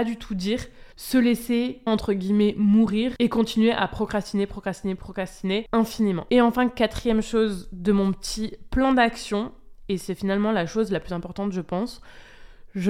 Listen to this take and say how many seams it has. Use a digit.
2